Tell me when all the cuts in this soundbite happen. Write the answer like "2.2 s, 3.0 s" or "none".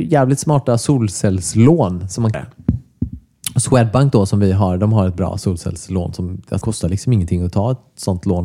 2.3 s, 6.6 s